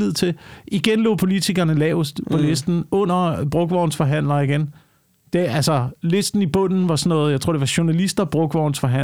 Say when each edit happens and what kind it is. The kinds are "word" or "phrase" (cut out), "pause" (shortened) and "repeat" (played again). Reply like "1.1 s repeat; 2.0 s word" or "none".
none